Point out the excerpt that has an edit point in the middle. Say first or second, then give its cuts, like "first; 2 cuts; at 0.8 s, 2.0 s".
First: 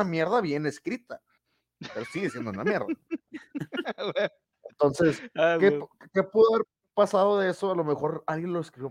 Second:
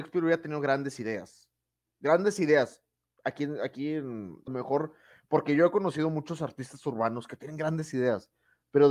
second; 1 cut; at 4.5 s